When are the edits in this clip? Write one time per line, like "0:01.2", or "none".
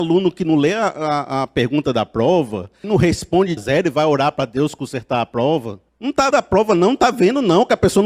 0:02.8
0:03.6
0:05.9
0:06.3